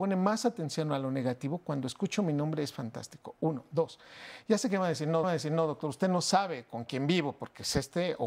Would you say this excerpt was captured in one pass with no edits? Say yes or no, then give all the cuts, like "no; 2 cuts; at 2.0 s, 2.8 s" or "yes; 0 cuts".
no; 1 cut; at 5.2 s